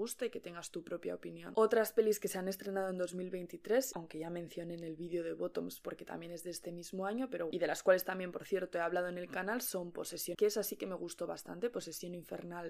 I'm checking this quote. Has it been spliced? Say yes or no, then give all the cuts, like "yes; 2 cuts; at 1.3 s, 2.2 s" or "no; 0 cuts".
yes; 2 cuts; at 7.5 s, 10.3 s